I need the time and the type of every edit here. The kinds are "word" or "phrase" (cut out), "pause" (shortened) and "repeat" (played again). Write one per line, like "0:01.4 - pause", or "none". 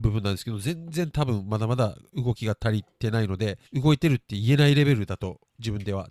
0:03.7 - pause